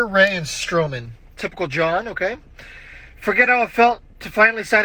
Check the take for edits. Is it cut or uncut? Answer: uncut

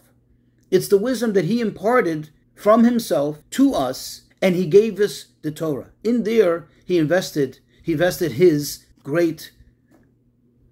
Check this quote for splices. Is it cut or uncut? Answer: cut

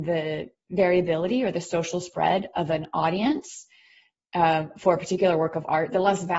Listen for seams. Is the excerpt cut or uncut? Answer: uncut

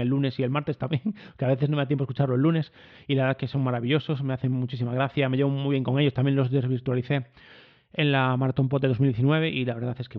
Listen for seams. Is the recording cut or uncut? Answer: uncut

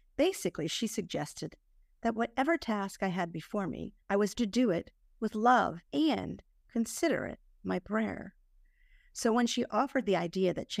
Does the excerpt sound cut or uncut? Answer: cut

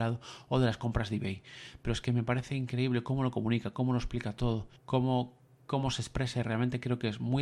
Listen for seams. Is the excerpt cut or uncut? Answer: cut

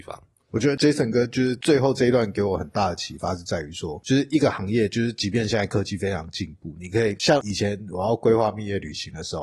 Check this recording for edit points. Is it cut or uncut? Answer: uncut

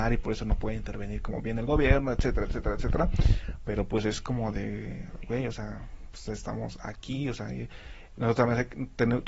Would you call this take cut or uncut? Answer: uncut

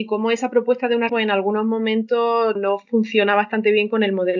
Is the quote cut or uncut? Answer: cut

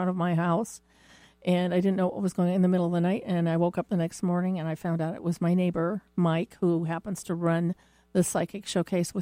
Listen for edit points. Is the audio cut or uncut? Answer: uncut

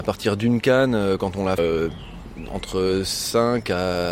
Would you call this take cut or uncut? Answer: cut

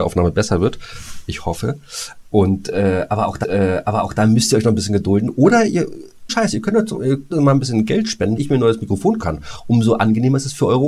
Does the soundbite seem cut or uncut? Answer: cut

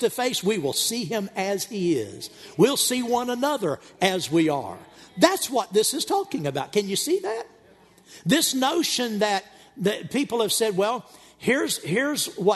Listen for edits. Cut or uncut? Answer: uncut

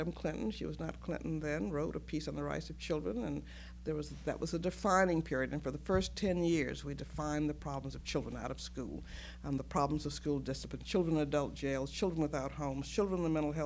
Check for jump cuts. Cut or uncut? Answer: uncut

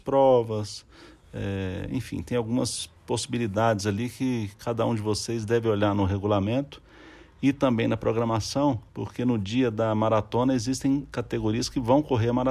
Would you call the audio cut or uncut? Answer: cut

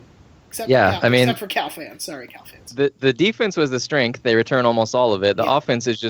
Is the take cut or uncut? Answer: uncut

